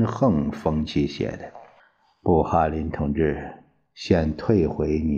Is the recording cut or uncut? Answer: cut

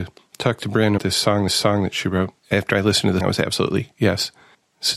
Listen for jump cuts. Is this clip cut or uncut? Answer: cut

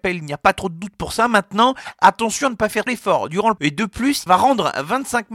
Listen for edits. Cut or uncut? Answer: cut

